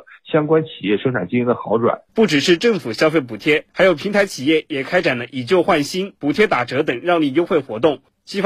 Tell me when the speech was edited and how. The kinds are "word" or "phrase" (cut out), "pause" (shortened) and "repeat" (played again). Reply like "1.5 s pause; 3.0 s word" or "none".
2.1 s pause; 3.7 s pause; 6.2 s pause